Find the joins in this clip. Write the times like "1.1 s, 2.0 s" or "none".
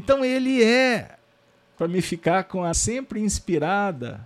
1.7 s, 2.7 s